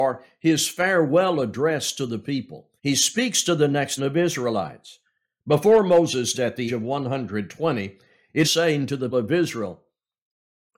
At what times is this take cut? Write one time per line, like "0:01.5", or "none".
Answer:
0:02.8
0:04.0
0:06.3
0:06.7
0:08.4
0:09.1